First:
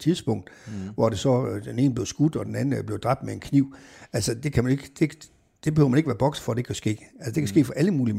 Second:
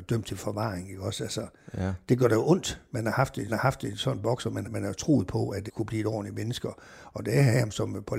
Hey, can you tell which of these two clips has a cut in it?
second; 3 cuts; at 3.5 s, 4.6 s, 5.7 s

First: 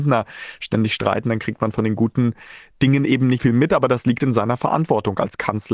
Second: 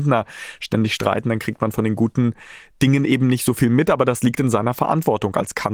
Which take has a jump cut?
first; 1 cut; at 3.4 s

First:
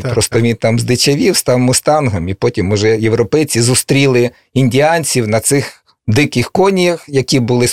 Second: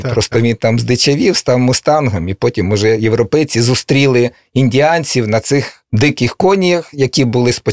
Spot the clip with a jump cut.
second; 1 cut; at 5.8 s

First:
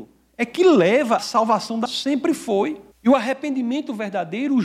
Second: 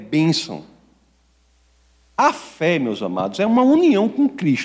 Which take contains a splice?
first; 3 cuts; at 1.2 s, 1.9 s, 2.9 s

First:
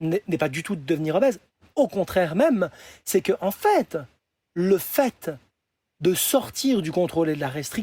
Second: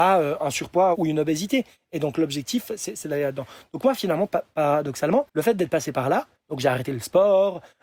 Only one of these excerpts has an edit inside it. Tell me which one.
second; 1 cut; at 5.3 s

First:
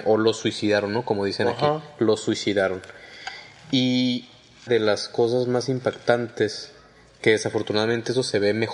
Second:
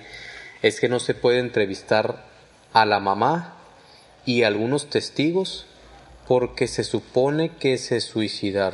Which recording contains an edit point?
first; 1 cut; at 4.7 s

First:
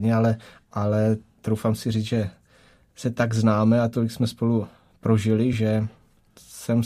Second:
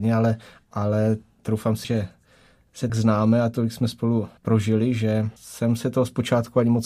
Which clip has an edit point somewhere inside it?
second; 4 cuts; at 1.8 s, 2.9 s, 4.4 s, 5.4 s

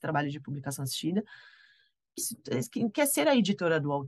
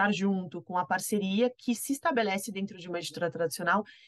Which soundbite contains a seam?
first; 1 cut; at 2.2 s

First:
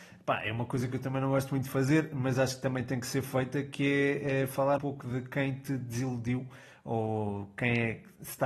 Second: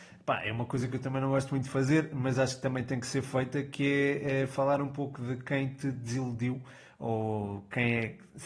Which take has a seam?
first; 1 cut; at 4.8 s

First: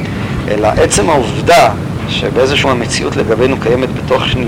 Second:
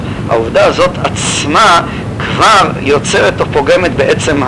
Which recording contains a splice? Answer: first; 1 cut; at 2.6 s

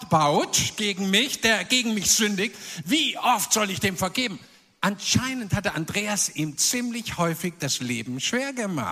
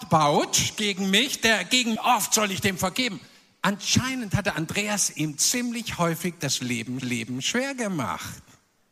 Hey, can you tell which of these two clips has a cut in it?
second; 2 cuts; at 2.0 s, 7.0 s

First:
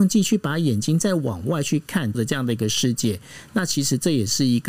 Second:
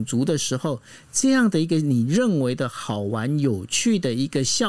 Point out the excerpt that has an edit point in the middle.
first; 1 cut; at 2.1 s

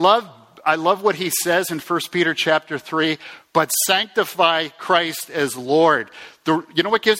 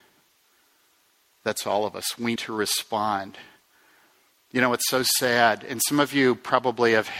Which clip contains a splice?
second; 1 cut; at 2.4 s

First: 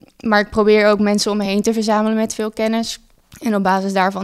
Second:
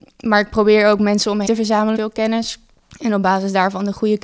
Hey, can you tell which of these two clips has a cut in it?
second; 2 cuts; at 1.5 s, 2.0 s

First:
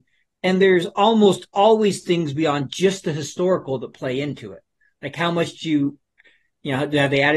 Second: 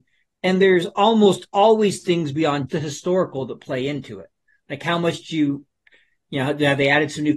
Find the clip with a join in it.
second; 1 cut; at 2.7 s

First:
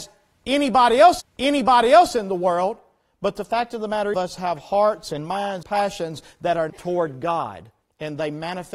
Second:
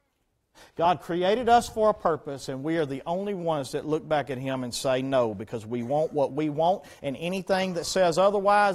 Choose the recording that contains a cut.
first; 5 cuts; at 1.2 s, 4.1 s, 5.6 s, 6.7 s, 7.8 s

